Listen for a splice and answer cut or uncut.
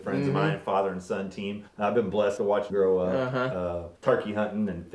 cut